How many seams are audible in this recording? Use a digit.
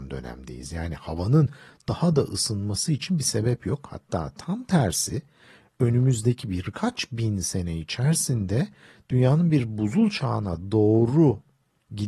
0